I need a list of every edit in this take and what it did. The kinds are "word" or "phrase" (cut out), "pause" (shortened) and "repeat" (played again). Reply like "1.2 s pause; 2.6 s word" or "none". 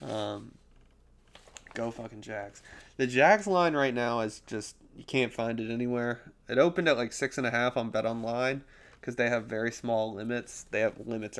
none